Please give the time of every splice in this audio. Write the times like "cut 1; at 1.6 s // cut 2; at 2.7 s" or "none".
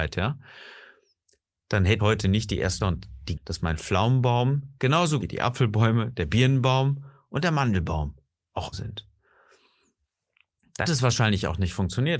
cut 1; at 2.0 s // cut 2; at 2.8 s // cut 3; at 3.4 s // cut 4; at 5.2 s // cut 5; at 8.7 s // cut 6; at 10.9 s